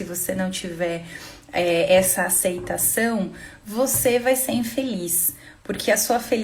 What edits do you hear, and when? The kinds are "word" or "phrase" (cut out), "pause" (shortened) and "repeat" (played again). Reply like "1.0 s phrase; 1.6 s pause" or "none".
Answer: none